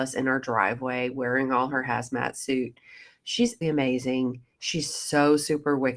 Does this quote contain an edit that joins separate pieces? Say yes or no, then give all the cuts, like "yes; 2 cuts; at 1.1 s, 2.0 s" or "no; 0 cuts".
yes; 1 cut; at 3.6 s